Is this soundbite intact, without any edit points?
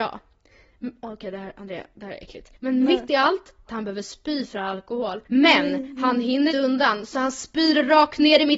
no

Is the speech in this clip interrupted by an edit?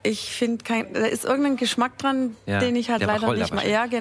no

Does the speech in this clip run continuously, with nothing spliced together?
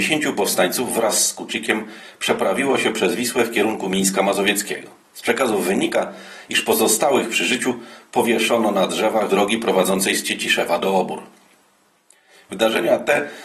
no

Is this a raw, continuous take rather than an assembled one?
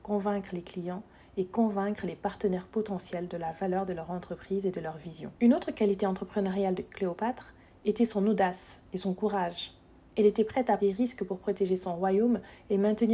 no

